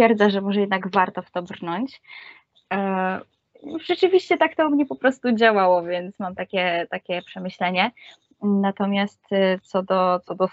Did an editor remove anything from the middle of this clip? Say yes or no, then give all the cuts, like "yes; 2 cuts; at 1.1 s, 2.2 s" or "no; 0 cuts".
no; 0 cuts